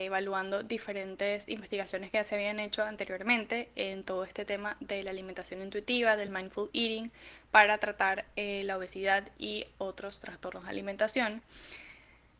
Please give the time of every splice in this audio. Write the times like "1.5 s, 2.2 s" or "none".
none